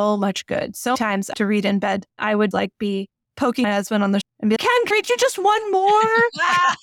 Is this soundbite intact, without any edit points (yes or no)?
no